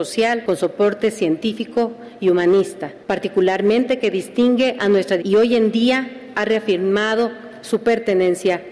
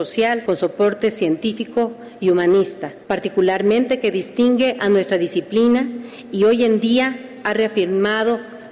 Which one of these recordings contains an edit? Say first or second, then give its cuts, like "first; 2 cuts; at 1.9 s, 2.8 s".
first; 1 cut; at 5.2 s